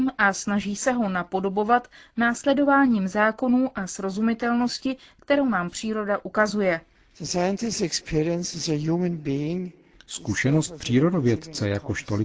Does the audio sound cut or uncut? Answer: uncut